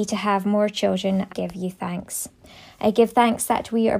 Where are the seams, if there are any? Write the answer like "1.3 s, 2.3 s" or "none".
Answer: 1.3 s